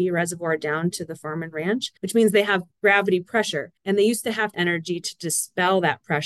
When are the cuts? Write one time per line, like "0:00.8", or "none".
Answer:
0:02.0
0:03.8
0:04.5

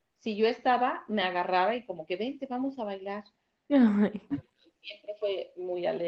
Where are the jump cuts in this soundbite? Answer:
none

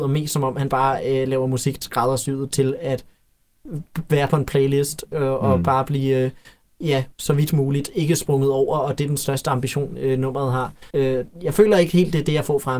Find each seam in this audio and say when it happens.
0:01.8
0:07.1
0:10.9

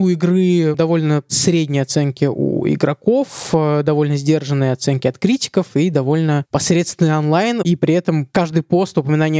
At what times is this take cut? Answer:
none

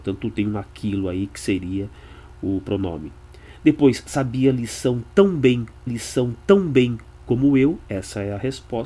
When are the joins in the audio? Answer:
0:05.9

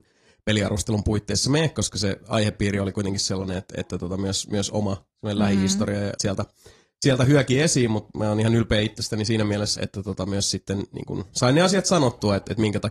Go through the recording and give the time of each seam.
0:06.2
0:09.7

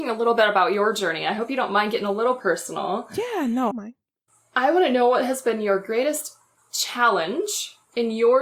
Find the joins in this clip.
0:03.7

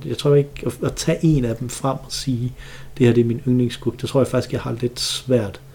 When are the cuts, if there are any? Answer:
none

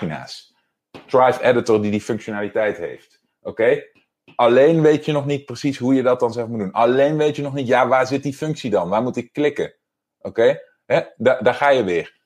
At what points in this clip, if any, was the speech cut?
none

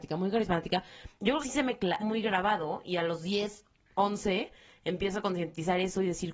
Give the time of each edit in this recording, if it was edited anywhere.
0:01.4
0:02.0
0:03.7

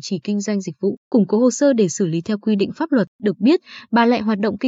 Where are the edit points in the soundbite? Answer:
0:01.0
0:03.1

